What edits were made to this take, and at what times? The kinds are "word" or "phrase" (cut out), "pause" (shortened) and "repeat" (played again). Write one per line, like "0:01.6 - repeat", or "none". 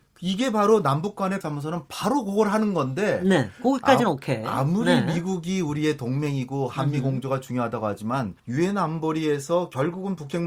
0:01.4 - phrase
0:08.4 - pause